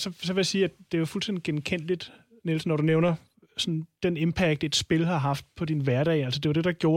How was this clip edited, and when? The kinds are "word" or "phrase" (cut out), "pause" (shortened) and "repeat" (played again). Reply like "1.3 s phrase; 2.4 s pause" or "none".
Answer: none

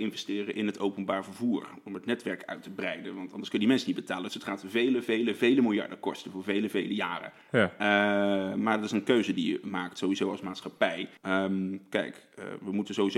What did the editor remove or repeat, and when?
7.4 s pause; 11.2 s pause

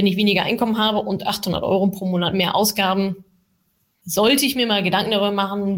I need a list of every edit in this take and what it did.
none

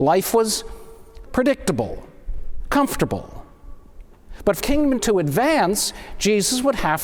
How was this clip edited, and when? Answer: 1.2 s word; 4.6 s word; 5.0 s word

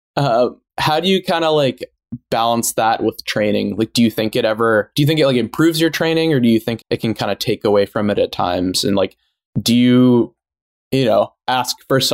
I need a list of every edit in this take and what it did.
6.8 s word

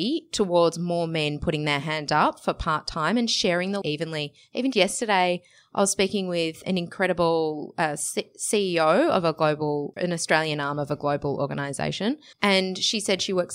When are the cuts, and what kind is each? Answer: 3.8 s word; 4.7 s word; 6.6 s word; 10.0 s word; 12.3 s pause

